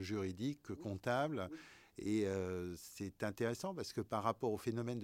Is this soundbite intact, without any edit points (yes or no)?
yes